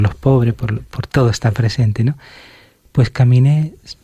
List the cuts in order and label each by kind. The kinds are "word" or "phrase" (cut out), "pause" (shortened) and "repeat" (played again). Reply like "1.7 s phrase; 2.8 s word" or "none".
1.1 s phrase